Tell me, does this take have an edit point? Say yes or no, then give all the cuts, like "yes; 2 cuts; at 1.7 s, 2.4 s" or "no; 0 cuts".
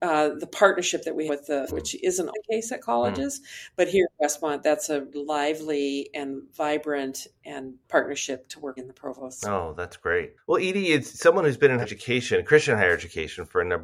yes; 8 cuts; at 1.3 s, 1.7 s, 2.3 s, 5.1 s, 7.8 s, 8.8 s, 10.4 s, 11.8 s